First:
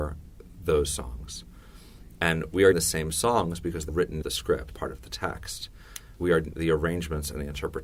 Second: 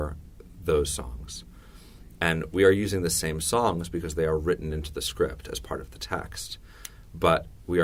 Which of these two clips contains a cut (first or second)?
first